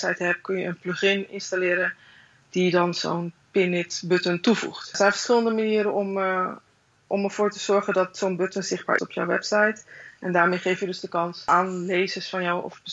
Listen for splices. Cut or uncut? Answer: cut